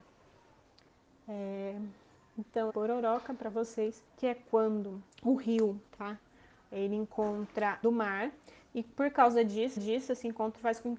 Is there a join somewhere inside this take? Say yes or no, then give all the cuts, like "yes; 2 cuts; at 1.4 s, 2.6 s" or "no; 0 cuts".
yes; 6 cuts; at 2.7 s, 4.1 s, 5.1 s, 5.9 s, 7.8 s, 9.8 s